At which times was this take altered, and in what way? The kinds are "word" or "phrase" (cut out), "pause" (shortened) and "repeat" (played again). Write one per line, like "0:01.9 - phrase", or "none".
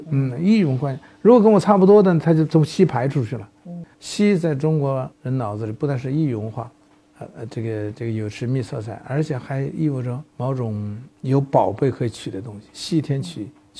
0:03.9 - pause
0:05.1 - pause
0:06.9 - pause
0:10.3 - pause
0:11.1 - pause